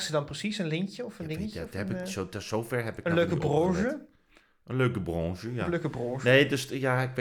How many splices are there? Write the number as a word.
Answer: zero